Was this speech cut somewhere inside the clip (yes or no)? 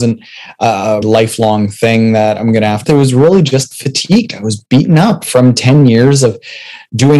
yes